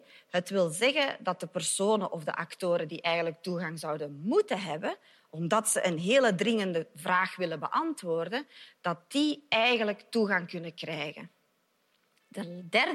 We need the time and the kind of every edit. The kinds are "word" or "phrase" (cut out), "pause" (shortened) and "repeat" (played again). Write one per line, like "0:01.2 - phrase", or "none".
none